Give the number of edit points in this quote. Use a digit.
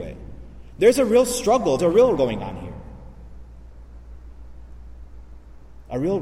2